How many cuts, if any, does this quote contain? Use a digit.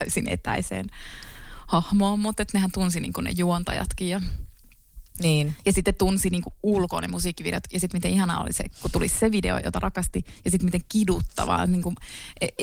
0